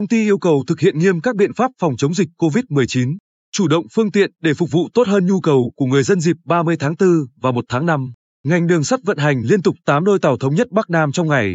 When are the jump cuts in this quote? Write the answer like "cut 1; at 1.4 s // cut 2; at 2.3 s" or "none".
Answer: none